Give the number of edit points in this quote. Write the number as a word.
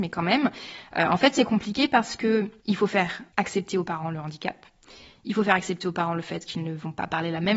zero